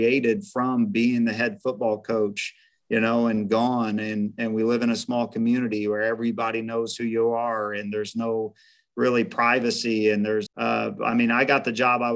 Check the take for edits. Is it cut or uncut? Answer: cut